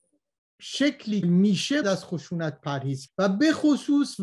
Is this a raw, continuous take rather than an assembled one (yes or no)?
no